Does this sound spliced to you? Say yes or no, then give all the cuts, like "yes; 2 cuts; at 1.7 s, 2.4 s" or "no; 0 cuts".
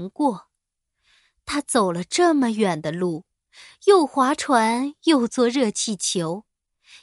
no; 0 cuts